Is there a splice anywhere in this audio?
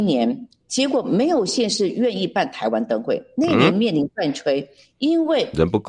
no; 0 cuts

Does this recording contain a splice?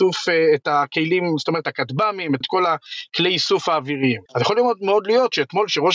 yes; 3 cuts; at 1.6 s, 2.4 s, 4.3 s

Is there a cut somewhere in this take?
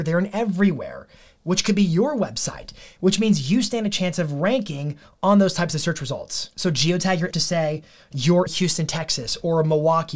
yes; 2 cuts; at 7.3 s, 8.5 s

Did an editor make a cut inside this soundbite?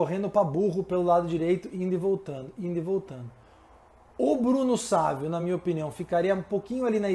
no; 0 cuts

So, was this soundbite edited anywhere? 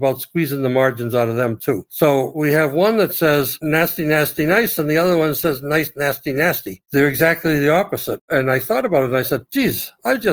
no; 0 cuts

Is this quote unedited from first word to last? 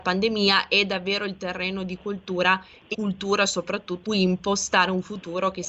no; 2 cuts; at 2.9 s, 4.0 s

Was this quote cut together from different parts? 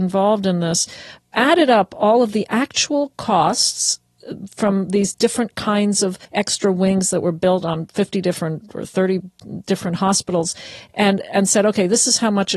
yes; 1 cut; at 6.2 s

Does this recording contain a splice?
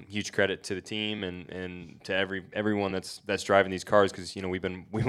no; 0 cuts

